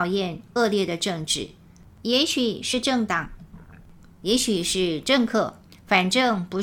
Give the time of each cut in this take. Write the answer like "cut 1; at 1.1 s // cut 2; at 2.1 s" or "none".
none